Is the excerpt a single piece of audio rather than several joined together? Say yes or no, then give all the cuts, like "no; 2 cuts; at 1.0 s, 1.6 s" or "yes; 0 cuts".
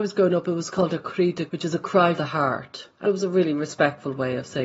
no; 3 cuts; at 1.5 s, 2.1 s, 3.0 s